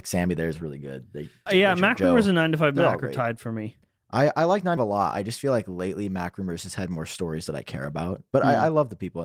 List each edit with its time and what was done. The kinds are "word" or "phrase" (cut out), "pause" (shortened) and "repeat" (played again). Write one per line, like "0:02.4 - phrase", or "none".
0:01.5 - word
0:04.0 - pause
0:04.8 - phrase